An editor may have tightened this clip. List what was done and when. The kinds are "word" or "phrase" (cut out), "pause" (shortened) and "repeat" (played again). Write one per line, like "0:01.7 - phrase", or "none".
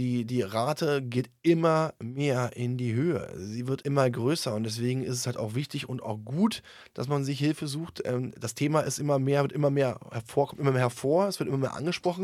0:03.8 - word